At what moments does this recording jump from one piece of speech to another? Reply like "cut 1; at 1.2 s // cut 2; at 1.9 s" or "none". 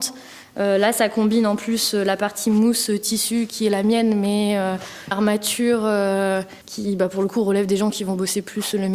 cut 1; at 5.1 s // cut 2; at 6.6 s